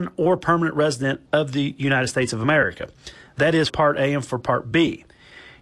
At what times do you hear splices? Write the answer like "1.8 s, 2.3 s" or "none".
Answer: 1.2 s, 3.7 s